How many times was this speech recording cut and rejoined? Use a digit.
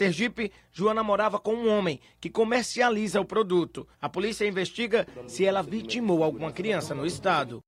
1